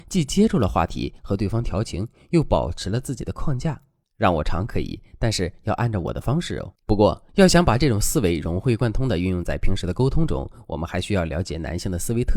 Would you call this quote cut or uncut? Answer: cut